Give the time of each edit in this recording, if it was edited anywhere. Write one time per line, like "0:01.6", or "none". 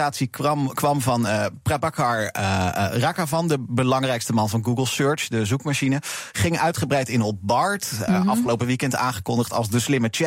none